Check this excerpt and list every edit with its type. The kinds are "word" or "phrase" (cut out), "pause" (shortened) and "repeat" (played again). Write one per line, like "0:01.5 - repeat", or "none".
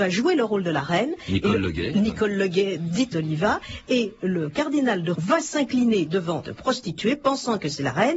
0:03.1 - word
0:05.1 - word
0:06.4 - word